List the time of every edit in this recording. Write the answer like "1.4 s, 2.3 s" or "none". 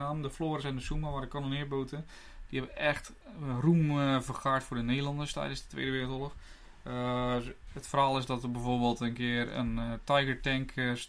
none